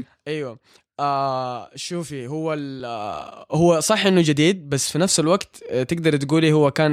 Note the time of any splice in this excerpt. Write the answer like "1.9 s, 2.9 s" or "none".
none